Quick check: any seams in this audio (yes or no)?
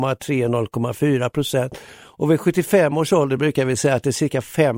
no